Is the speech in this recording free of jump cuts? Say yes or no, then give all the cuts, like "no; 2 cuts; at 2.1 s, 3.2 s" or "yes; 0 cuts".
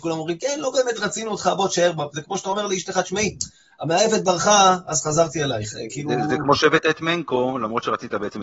yes; 0 cuts